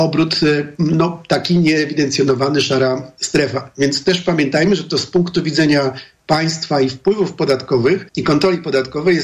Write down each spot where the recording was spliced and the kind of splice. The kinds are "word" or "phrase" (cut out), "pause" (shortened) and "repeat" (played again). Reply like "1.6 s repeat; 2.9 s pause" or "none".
8.1 s pause